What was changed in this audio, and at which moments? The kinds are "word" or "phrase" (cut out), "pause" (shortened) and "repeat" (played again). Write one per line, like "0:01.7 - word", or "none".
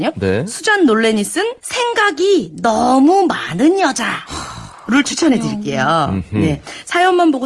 0:01.6 - pause